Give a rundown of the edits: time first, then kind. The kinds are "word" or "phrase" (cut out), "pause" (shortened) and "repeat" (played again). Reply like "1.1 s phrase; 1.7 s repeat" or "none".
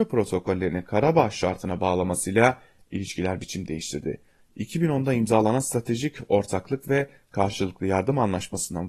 none